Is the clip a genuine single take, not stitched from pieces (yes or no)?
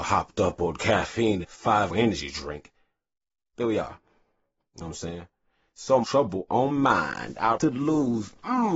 no